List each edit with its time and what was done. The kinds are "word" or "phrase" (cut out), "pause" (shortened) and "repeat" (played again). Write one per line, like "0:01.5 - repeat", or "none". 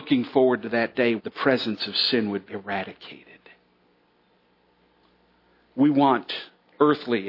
0:01.2 - word
0:02.5 - word